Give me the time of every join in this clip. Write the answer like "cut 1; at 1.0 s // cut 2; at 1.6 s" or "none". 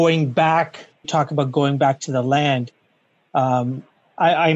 cut 1; at 1.0 s